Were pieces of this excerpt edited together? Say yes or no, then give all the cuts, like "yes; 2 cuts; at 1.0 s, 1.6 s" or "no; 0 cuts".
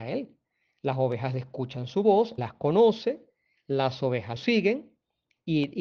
yes; 2 cuts; at 2.4 s, 4.4 s